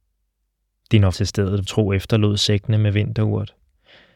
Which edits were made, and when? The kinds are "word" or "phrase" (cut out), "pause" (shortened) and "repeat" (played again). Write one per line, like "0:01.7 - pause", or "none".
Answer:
0:01.1 - word
0:01.6 - word